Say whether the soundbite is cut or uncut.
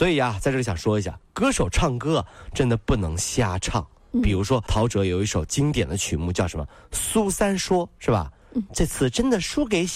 cut